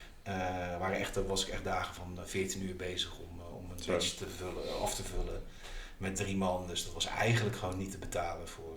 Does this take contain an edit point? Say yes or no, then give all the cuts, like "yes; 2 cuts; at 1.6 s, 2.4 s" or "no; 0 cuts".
no; 0 cuts